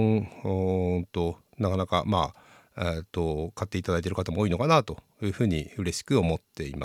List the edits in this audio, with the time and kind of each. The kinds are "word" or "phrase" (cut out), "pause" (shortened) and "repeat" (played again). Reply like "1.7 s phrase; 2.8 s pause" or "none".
none